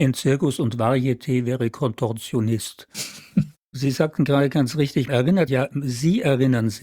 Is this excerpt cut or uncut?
cut